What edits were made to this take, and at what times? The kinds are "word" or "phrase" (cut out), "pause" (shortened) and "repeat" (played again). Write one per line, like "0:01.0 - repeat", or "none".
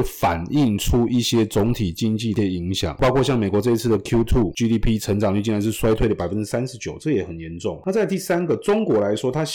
none

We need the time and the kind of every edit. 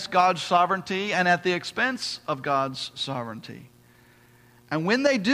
none

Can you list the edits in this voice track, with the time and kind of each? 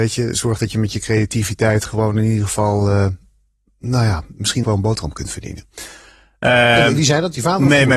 0:04.6 - word

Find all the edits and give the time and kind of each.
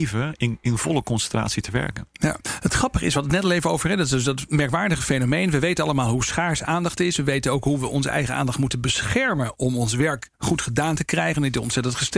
none

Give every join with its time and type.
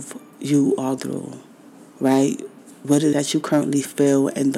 0:01.0 - word
0:01.9 - pause
0:03.1 - word

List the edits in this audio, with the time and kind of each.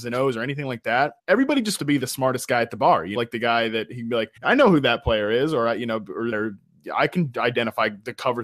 0:01.2 - pause
0:01.8 - word
0:03.2 - word
0:04.4 - pause
0:06.3 - phrase

